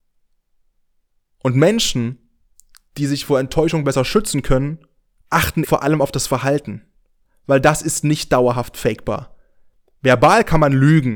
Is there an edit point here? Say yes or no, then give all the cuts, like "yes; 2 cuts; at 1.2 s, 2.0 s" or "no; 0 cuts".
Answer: yes; 1 cut; at 5.6 s